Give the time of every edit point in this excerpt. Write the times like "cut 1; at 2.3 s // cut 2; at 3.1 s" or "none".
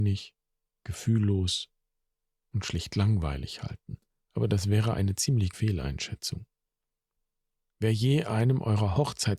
cut 1; at 4.1 s // cut 2; at 5.5 s